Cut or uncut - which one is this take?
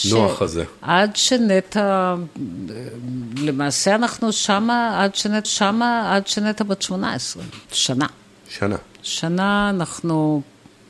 cut